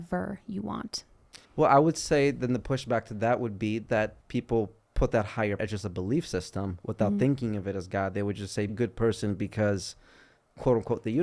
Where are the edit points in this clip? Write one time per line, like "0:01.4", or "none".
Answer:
0:01.4
0:04.2
0:05.6
0:08.7